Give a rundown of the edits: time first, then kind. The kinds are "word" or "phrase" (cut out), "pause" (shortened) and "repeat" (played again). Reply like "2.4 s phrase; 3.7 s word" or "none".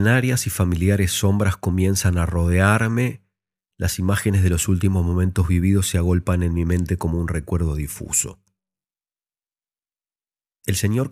none